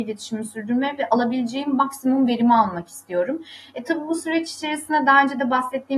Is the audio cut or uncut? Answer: uncut